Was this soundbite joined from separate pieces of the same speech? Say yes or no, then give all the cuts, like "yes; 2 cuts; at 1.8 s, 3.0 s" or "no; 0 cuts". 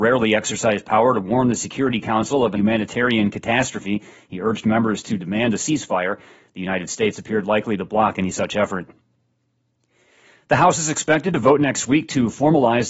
yes; 1 cut; at 2.5 s